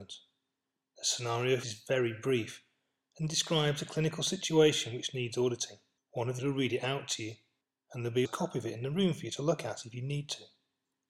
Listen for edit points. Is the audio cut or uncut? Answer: cut